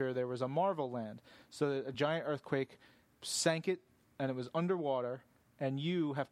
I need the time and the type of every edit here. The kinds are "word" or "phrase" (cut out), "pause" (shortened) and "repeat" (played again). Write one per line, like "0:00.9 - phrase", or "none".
none